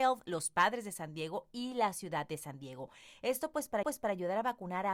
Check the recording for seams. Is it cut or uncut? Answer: cut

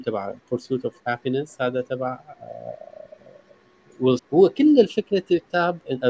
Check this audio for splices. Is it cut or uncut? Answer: cut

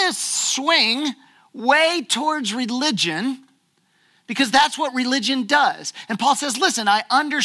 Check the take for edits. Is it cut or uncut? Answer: uncut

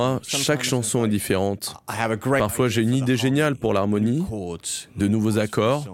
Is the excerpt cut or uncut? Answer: uncut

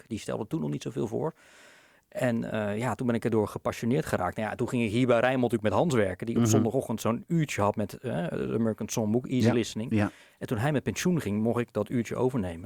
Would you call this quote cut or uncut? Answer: uncut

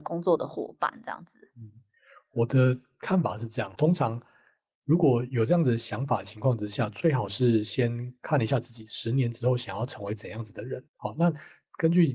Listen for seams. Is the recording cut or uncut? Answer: cut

